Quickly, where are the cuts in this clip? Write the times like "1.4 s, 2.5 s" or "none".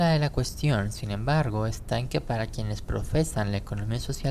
none